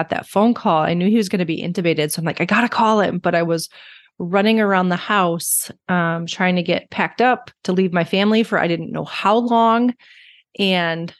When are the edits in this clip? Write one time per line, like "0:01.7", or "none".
0:07.6

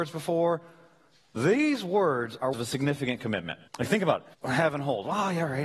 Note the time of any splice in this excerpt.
0:02.5
0:03.7
0:04.3

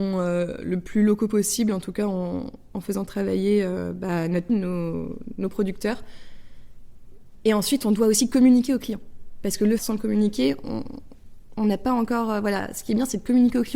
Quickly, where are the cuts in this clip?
0:04.5
0:09.8

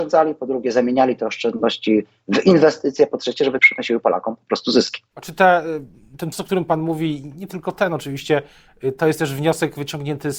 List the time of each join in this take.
0:03.6
0:05.1
0:06.3

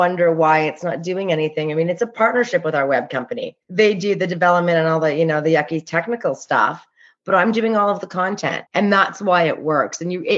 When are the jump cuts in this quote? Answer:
0:03.6
0:08.7

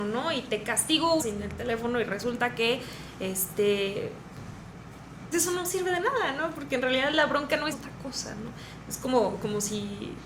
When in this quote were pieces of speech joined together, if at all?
0:01.2
0:05.3
0:07.7

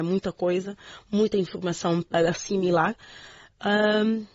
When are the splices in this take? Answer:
none

